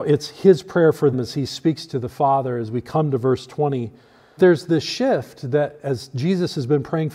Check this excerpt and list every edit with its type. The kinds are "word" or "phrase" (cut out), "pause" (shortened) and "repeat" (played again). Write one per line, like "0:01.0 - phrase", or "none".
0:01.1 - word
0:04.4 - word